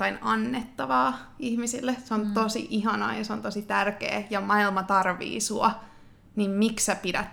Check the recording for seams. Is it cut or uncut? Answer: uncut